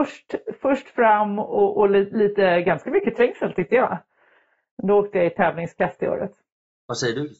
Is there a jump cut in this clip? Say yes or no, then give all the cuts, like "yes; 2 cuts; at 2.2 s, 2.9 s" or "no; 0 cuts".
no; 0 cuts